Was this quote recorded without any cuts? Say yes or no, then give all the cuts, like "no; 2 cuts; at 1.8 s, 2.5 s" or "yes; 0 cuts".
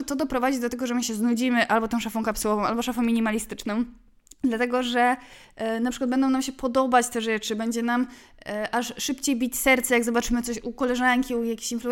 yes; 0 cuts